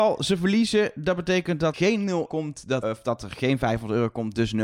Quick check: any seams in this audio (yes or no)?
yes